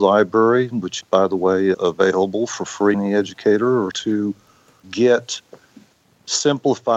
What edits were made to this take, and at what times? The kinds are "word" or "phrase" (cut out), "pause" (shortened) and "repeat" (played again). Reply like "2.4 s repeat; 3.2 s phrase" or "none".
1.0 s word; 1.7 s word; 2.9 s word; 3.9 s word; 4.8 s word